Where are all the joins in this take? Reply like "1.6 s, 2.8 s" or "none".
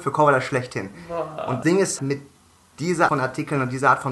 1.6 s, 2.0 s, 3.1 s